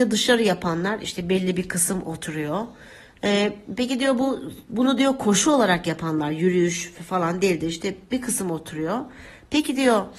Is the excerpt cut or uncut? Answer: uncut